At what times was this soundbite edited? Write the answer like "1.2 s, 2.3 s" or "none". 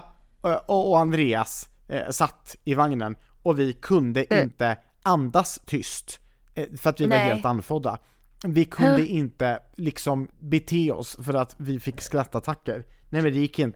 10.3 s